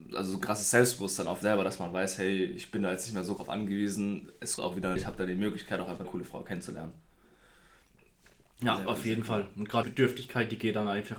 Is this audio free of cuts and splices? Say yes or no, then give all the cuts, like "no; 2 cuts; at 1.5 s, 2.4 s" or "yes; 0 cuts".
no; 6 cuts; at 1.4 s, 3.4 s, 4.6 s, 5.0 s, 6.0 s, 9.8 s